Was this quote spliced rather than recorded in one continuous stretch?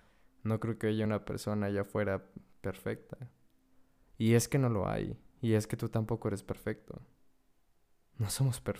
no; 0 cuts

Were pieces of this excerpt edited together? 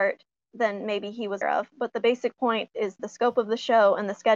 yes; 2 cuts; at 1.4 s, 3.0 s

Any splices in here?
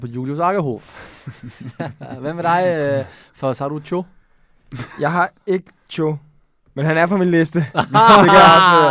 no; 0 cuts

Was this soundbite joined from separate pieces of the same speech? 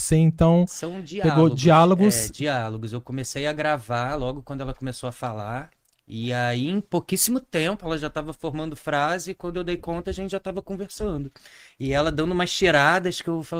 no; 0 cuts

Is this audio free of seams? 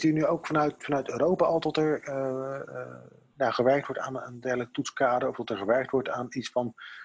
yes; 0 cuts

